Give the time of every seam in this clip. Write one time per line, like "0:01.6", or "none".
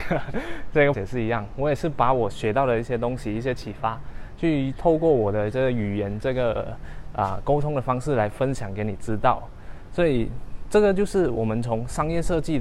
0:00.9